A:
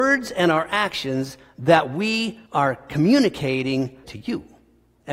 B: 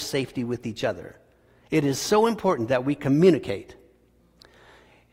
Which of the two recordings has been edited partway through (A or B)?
A